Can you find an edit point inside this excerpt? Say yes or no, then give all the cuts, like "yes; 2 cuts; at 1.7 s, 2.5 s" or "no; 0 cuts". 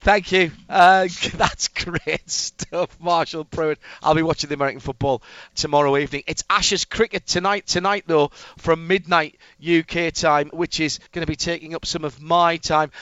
yes; 4 cuts; at 5.5 s, 7.6 s, 10.5 s, 11.1 s